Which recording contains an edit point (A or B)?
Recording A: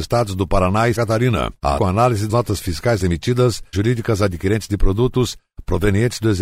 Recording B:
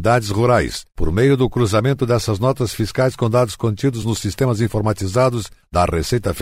A